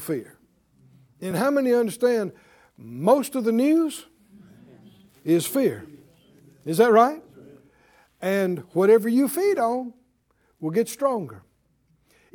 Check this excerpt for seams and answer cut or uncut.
uncut